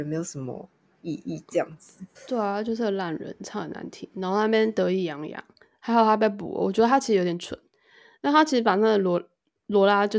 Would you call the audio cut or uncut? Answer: cut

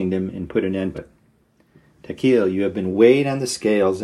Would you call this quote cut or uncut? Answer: cut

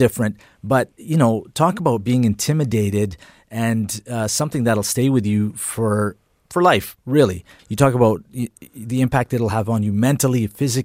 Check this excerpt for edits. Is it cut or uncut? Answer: cut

